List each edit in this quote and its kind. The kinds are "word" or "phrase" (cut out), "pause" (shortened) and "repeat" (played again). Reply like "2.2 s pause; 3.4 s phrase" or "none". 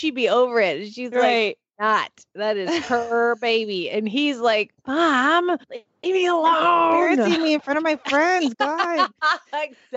5.6 s pause